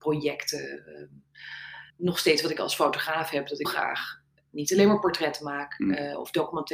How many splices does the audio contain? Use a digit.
2